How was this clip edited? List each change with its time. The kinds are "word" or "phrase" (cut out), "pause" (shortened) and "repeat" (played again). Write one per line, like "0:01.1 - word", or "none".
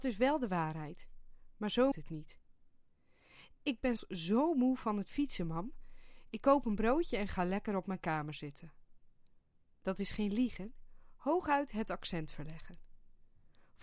0:01.9 - word
0:04.0 - word